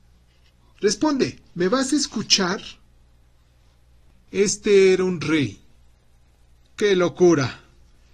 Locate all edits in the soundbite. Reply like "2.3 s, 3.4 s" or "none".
none